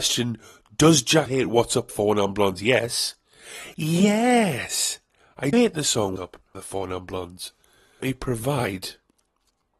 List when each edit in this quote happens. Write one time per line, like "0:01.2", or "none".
0:01.3
0:01.9
0:05.5
0:06.2
0:06.5
0:08.0